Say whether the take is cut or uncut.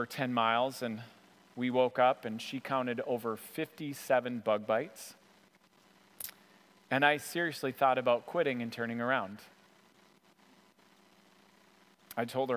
uncut